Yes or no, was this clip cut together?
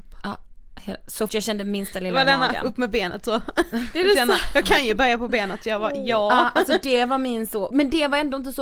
yes